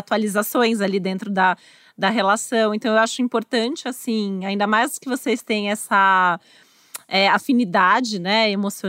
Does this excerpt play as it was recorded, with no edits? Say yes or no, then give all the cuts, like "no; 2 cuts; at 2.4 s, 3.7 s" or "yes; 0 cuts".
yes; 0 cuts